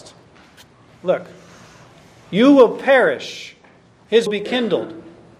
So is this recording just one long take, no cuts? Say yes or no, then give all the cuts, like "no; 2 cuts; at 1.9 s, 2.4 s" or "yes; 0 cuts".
no; 1 cut; at 4.3 s